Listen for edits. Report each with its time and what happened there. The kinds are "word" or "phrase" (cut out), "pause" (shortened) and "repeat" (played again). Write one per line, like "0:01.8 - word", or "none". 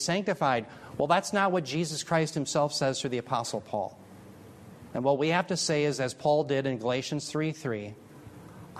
none